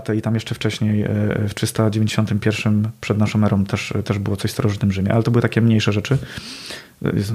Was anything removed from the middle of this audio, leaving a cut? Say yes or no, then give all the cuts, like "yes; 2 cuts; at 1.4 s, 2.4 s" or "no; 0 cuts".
no; 0 cuts